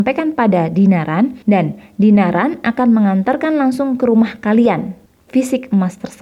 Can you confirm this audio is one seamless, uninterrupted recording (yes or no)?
no